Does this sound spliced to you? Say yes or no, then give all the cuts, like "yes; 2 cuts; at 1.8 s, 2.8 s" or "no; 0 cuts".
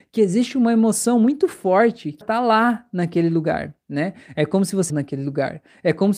yes; 2 cuts; at 2.2 s, 4.9 s